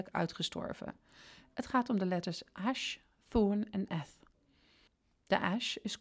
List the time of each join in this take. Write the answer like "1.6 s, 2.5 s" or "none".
none